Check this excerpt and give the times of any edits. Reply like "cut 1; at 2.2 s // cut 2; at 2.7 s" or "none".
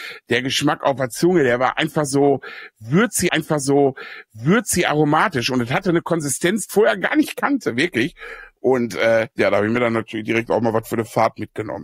cut 1; at 3.3 s // cut 2; at 6.7 s // cut 3; at 9.3 s